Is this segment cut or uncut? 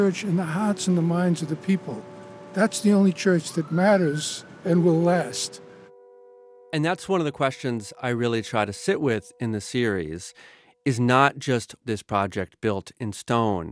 cut